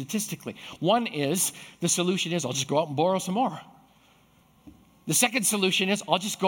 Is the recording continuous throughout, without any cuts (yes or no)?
yes